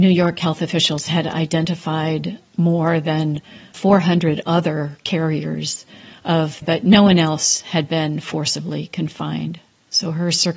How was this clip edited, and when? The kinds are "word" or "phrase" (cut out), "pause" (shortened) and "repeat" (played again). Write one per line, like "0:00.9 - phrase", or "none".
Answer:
0:03.7 - word
0:06.6 - phrase